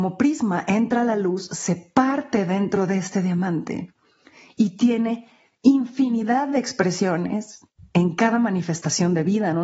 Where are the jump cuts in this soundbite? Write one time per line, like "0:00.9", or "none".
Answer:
none